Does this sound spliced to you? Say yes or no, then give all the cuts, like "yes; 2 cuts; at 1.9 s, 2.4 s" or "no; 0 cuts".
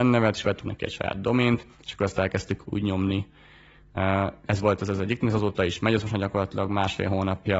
yes; 3 cuts; at 1.7 s, 2.6 s, 5.2 s